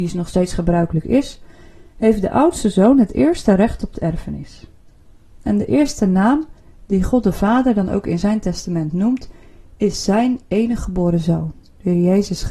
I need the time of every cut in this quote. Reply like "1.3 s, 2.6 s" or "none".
none